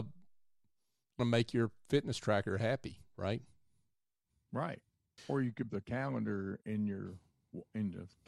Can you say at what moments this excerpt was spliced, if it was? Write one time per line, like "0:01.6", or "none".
0:01.2
0:05.2
0:05.7